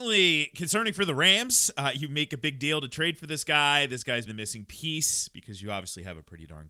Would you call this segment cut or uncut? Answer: cut